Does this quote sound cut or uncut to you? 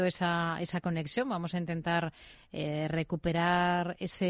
uncut